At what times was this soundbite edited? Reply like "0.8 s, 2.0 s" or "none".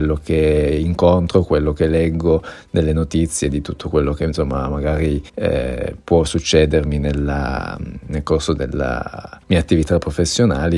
5.3 s, 9.4 s